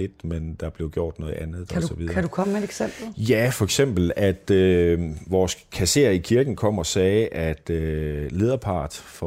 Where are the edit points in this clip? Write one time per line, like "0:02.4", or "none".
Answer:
none